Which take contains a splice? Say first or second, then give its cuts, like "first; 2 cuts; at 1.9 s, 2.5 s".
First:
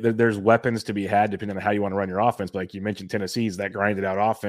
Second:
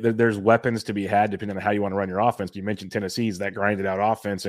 second; 1 cut; at 2.5 s